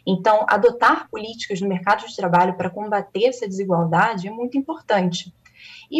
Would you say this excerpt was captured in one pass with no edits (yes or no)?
yes